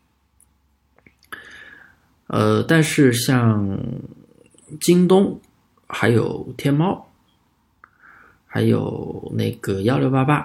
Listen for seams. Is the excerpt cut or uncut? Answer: uncut